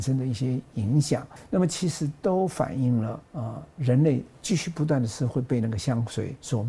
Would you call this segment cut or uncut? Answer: cut